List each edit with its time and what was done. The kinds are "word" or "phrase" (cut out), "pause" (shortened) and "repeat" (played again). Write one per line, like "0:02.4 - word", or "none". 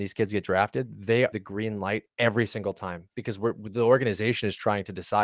0:01.3 - word
0:02.1 - pause